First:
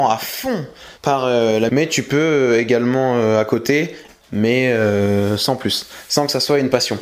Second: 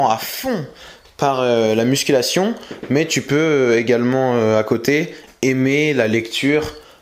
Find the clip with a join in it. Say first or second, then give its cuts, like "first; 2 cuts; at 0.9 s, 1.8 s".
first; 3 cuts; at 1.0 s, 1.7 s, 4.2 s